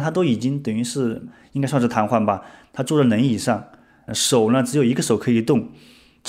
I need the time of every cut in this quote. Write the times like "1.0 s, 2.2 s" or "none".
4.1 s